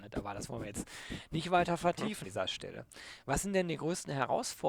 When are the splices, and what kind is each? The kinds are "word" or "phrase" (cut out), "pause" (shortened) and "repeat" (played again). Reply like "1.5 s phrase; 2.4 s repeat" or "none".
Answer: 2.2 s word